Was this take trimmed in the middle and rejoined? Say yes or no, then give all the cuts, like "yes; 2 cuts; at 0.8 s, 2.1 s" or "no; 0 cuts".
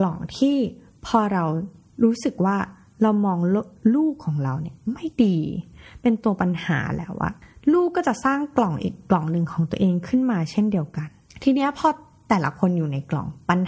no; 0 cuts